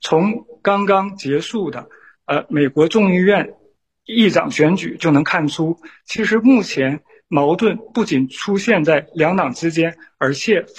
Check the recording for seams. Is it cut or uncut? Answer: cut